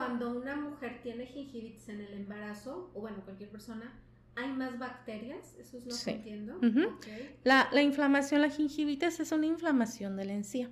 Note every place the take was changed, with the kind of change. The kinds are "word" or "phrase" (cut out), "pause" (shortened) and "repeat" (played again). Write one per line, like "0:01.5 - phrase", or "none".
none

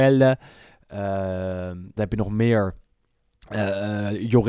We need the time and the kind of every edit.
0:02.0 - word

